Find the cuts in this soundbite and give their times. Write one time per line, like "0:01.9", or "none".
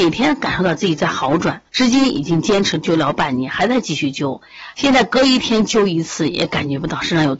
0:01.7